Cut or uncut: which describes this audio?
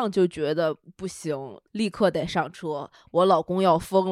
cut